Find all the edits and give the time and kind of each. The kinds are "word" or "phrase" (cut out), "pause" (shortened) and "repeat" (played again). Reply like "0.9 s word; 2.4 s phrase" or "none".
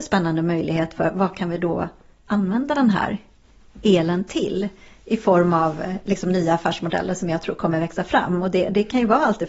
none